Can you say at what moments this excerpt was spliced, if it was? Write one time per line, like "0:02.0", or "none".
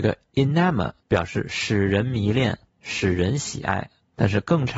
0:01.0

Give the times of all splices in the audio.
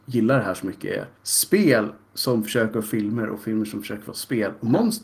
0:01.2

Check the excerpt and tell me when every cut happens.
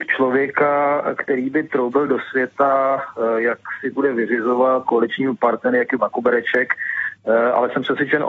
0:03.9
0:04.9
0:06.0

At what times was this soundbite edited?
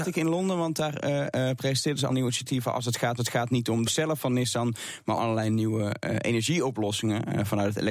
0:02.1
0:03.2
0:03.8
0:05.2

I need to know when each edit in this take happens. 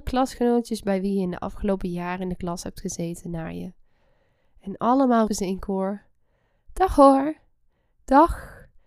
0:05.3

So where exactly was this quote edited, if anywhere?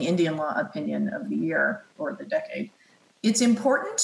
none

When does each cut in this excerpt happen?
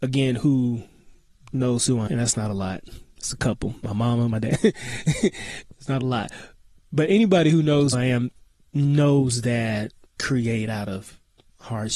0:02.1
0:07.9
0:10.2

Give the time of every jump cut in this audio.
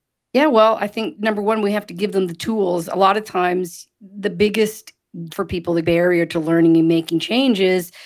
0:05.3
0:05.8

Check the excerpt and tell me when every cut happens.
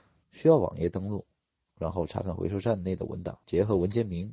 0:03.4

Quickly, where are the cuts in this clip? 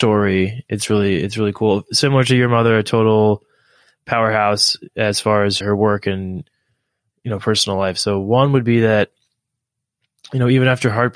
0:05.6

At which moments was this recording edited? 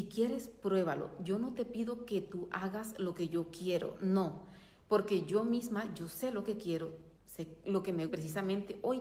0:07.1
0:08.1

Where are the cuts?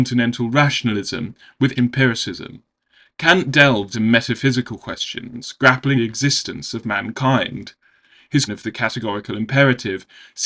0:01.8
0:03.9
0:06.0
0:08.5

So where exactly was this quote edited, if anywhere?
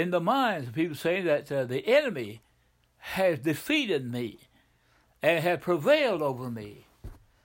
none

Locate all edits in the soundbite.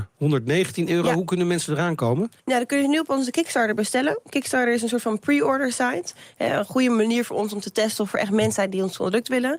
0:02.4

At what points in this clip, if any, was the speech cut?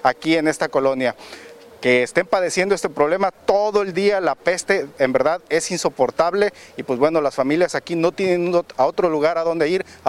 none

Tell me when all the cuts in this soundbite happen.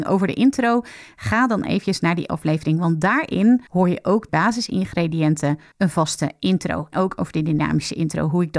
0:03.7
0:04.3
0:05.7
0:06.9

